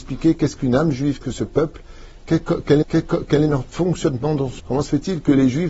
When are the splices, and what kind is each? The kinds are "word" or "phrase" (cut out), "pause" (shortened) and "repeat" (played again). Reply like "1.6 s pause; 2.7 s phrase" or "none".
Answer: 1.2 s word; 2.8 s repeat; 4.6 s word

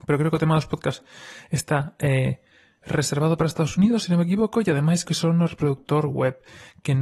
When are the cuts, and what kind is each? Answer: 5.0 s word

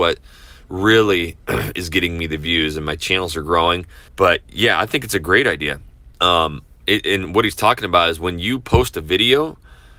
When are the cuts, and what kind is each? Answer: 4.1 s pause; 6.1 s pause

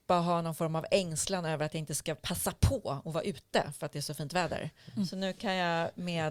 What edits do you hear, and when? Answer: none

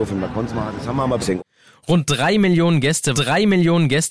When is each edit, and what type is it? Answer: 1.2 s phrase; 3.1 s repeat

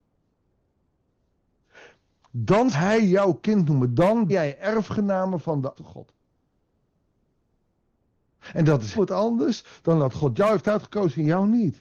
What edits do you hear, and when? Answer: 2.7 s word; 4.3 s word; 5.7 s word; 8.9 s word

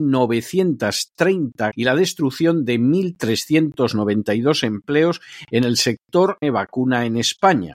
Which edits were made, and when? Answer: 1.7 s word; 6.4 s phrase

